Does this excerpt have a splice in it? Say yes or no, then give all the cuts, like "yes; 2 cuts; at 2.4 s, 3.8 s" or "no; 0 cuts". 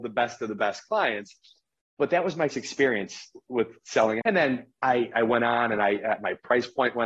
yes; 3 cuts; at 2.5 s, 4.2 s, 5.1 s